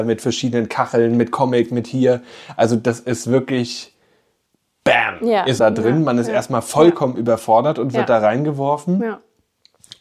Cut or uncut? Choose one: cut